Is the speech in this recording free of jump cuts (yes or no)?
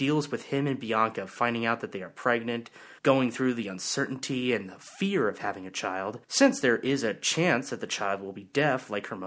no